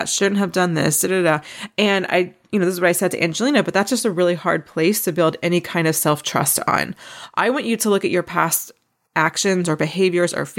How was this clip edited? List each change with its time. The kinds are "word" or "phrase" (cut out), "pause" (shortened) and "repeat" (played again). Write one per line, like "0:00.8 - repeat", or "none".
0:01.1 - word